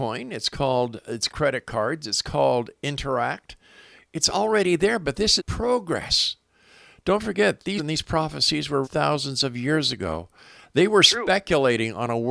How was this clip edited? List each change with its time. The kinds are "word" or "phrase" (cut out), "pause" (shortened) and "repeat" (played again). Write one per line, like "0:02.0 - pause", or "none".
0:01.3 - word
0:05.4 - word
0:07.8 - word
0:08.8 - word